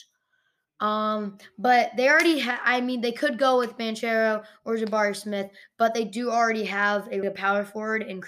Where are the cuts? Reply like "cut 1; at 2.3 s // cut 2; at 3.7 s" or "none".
cut 1; at 7.2 s